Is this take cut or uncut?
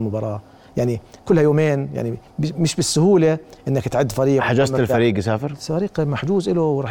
uncut